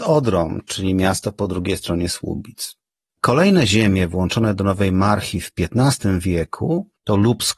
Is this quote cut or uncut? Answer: uncut